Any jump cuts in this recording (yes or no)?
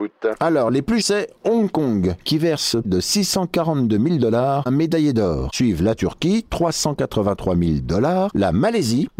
yes